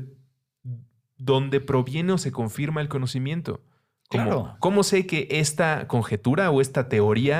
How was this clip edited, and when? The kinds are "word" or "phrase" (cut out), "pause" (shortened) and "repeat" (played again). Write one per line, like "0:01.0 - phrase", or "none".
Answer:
none

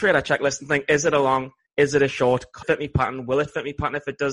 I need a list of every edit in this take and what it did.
0:02.6 - word

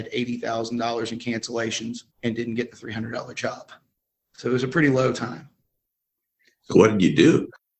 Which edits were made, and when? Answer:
0:02.1 - pause

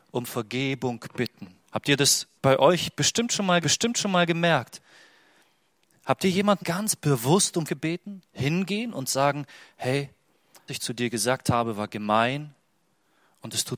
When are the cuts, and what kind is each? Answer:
0:01.6 - pause
0:02.4 - pause
0:03.6 - repeat
0:06.6 - word
0:07.7 - word
0:10.7 - phrase

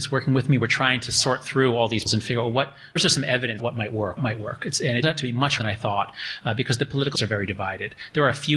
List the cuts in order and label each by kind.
0:02.1 - word
0:03.0 - word
0:03.6 - word
0:04.2 - word
0:05.0 - word
0:05.6 - word
0:07.1 - word

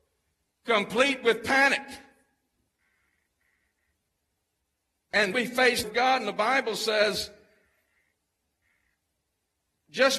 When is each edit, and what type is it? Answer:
0:05.3 - word
0:05.8 - phrase

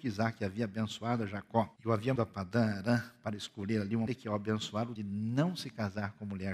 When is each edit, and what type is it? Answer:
0:01.8 - pause
0:02.2 - word
0:04.1 - word
0:05.0 - phrase

